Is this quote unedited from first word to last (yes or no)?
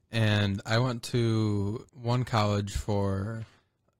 no